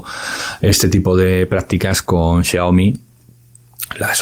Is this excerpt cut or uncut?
uncut